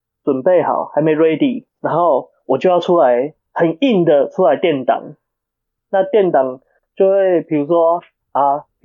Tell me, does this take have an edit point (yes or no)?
yes